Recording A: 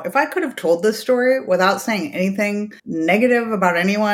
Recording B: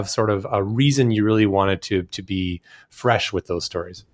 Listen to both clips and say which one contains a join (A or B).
A